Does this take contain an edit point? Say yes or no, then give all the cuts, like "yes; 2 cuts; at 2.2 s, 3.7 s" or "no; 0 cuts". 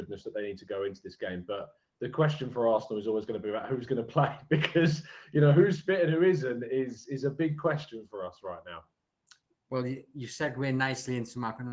no; 0 cuts